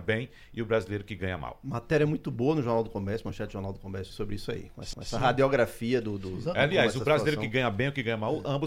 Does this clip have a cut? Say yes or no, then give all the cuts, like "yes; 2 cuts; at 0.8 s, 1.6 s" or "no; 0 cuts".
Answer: yes; 2 cuts; at 4.1 s, 4.9 s